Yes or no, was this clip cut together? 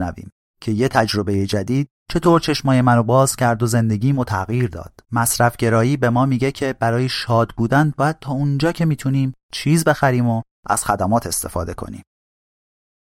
yes